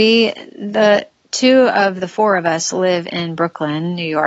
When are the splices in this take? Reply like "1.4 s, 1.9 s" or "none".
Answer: none